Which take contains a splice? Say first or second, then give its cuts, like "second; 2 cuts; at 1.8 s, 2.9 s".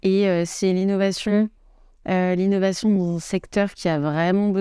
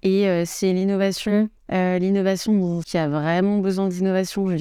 second; 2 cuts; at 1.6 s, 2.8 s